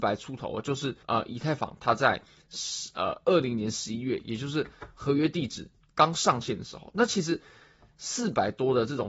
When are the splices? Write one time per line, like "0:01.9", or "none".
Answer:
0:01.0
0:05.7